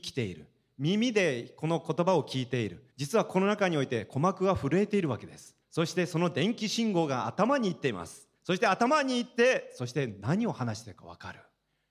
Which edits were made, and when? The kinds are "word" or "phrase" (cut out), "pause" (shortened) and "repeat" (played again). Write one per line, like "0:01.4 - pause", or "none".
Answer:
0:02.9 - pause
0:05.6 - pause
0:08.4 - pause